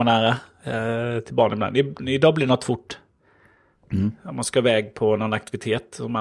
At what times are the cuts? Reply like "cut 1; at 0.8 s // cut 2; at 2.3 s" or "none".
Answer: none